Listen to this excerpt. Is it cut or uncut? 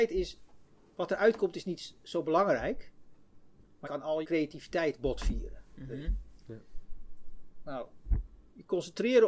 cut